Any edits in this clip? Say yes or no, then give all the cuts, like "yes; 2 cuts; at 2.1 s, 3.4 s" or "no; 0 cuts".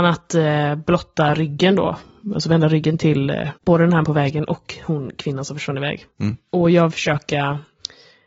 yes; 3 cuts; at 3.6 s, 4.0 s, 6.9 s